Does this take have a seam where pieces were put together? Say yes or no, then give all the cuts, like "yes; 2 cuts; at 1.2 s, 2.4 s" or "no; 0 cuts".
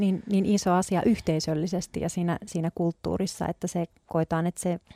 no; 0 cuts